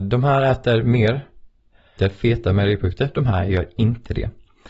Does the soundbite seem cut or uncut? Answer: cut